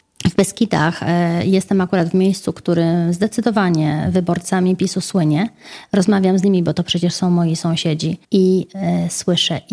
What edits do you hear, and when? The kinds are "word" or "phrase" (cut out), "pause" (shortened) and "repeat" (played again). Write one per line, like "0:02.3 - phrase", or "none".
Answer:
0:08.2 - pause